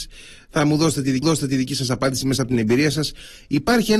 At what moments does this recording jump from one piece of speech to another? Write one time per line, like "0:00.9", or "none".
0:01.2

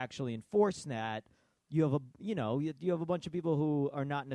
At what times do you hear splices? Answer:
none

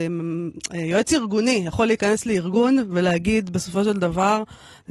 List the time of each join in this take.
none

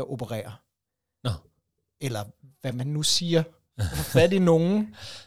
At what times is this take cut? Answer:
none

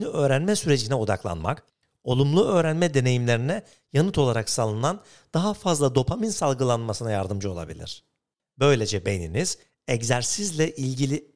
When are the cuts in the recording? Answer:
none

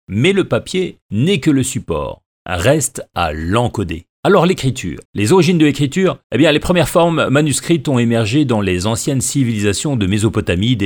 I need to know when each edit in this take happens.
0:04.1
0:05.1
0:06.2

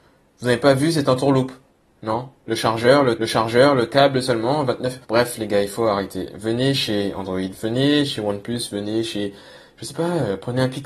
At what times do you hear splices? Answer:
0:01.1
0:03.2
0:05.0

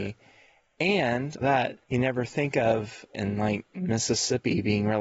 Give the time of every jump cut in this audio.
0:01.4
0:01.8
0:03.1

